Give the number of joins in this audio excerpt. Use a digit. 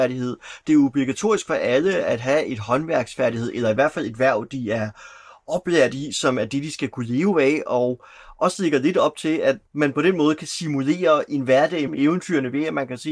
2